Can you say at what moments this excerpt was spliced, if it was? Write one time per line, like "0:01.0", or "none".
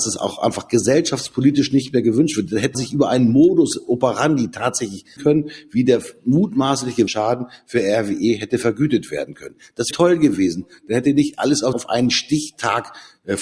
0:02.7
0:05.2
0:07.1
0:09.9
0:11.7